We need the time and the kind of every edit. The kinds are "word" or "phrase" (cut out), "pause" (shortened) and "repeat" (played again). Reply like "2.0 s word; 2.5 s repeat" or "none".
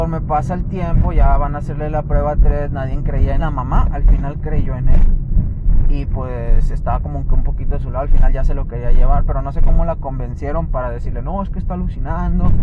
3.4 s phrase; 10.7 s word

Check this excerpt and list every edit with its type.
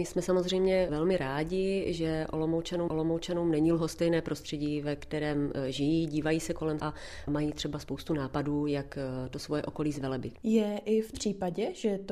2.9 s repeat; 6.8 s word; 11.1 s word

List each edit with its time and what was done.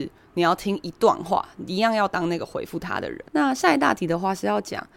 3.3 s pause

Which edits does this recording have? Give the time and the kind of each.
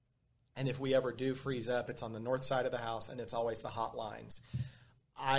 none

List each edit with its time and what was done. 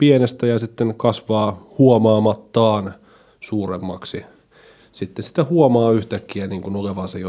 none

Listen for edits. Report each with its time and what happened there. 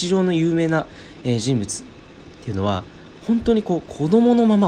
2.3 s pause

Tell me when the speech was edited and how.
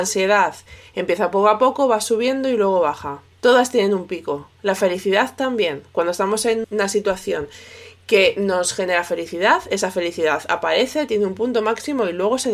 3.3 s pause; 6.6 s word

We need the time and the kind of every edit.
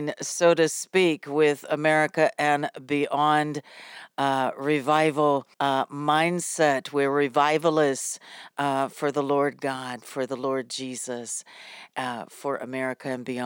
5.5 s pause

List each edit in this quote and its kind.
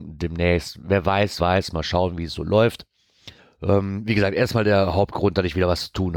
1.4 s word; 3.4 s pause

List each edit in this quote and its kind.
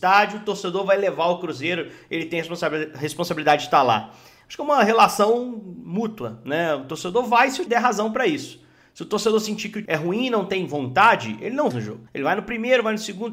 7.7 s word; 9.9 s word; 11.7 s phrase; 12.1 s pause

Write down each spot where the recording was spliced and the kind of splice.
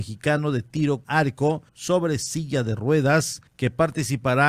1.0 s word; 1.7 s pause; 3.5 s pause

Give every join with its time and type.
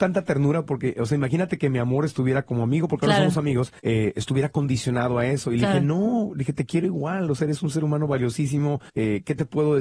3.8 s pause; 8.9 s pause

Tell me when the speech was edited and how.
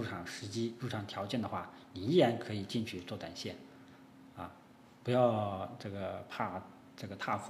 none

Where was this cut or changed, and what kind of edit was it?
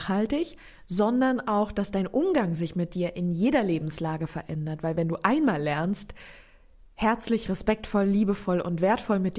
none

